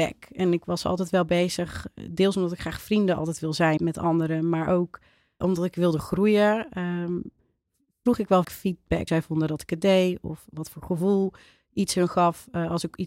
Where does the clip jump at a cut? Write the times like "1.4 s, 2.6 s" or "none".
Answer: 3.8 s, 5.4 s, 8.4 s, 9.1 s